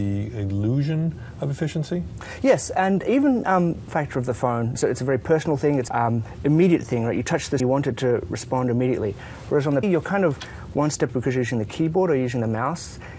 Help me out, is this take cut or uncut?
cut